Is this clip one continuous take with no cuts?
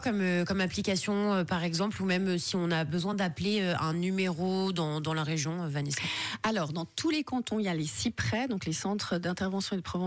yes; 0 cuts

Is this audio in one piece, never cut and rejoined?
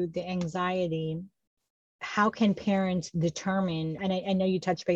yes; 0 cuts

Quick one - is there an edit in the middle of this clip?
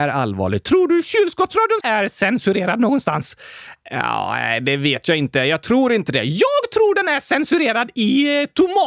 yes; 1 cut; at 1.8 s

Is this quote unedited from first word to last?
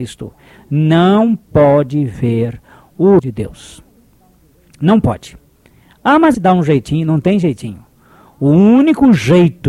no; 2 cuts; at 3.2 s, 6.3 s

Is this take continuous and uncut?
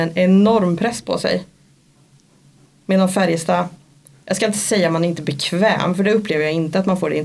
yes; 0 cuts

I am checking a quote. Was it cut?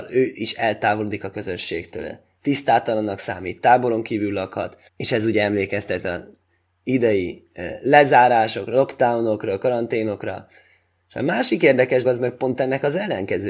yes; 3 cuts; at 4.9 s, 6.0 s, 12.0 s

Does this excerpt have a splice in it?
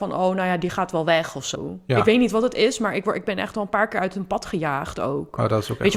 no; 0 cuts

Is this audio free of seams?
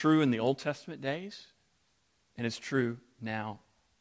yes; 0 cuts

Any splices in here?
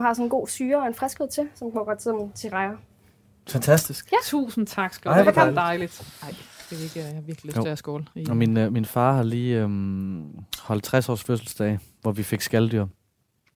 no; 0 cuts

